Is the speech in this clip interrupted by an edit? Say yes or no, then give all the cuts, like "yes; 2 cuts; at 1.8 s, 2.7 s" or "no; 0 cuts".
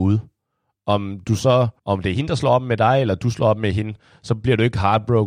yes; 1 cut; at 1.8 s